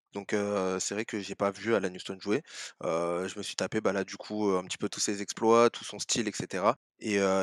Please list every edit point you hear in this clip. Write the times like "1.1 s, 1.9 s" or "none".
none